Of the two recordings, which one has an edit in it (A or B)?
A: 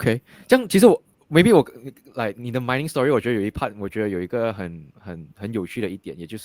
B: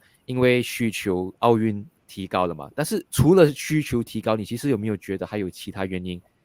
B